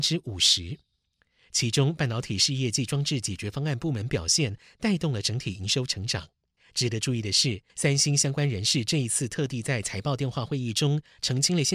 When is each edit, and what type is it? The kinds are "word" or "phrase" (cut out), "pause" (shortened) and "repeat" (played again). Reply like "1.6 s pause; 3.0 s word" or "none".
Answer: 6.6 s pause; 7.7 s pause